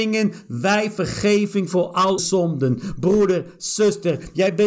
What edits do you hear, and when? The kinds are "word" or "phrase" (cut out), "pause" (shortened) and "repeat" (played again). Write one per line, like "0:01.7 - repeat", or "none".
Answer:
0:02.2 - word